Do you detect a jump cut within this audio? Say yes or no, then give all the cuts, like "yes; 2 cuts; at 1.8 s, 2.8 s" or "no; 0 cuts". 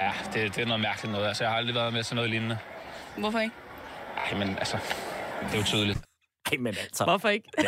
no; 0 cuts